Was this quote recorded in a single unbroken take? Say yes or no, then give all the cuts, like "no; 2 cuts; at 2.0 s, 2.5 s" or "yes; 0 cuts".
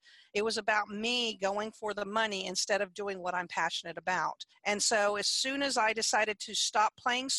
no; 1 cut; at 4.5 s